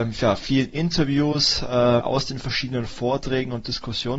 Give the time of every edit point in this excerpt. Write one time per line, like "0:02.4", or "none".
0:02.0